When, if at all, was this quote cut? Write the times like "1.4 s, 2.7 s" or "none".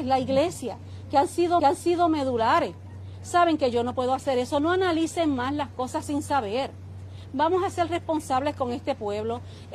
1.6 s

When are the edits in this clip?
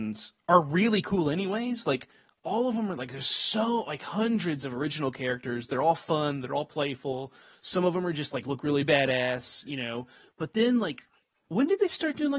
none

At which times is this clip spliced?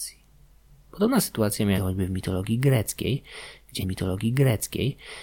1.8 s, 3.8 s

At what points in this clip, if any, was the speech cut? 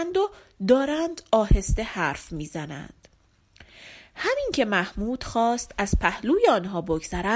none

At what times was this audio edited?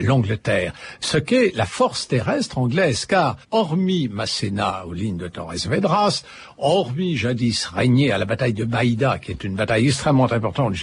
3.4 s

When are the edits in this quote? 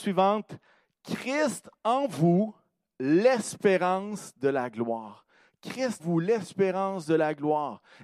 6.0 s

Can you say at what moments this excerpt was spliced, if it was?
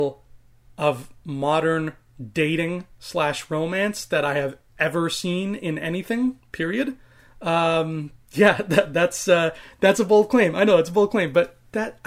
none

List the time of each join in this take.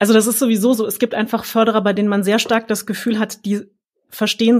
none

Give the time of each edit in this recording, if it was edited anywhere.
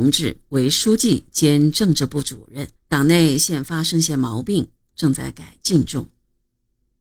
2.8 s

